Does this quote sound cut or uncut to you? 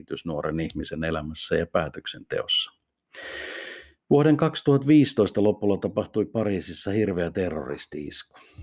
uncut